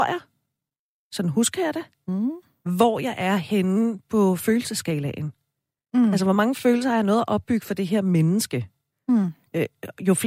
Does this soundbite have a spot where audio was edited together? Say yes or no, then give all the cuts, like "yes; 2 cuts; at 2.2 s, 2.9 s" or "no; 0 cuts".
no; 0 cuts